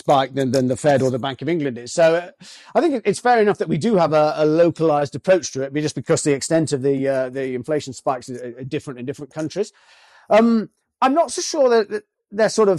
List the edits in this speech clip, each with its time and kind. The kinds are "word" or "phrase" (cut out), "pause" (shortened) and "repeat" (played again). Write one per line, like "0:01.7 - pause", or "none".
none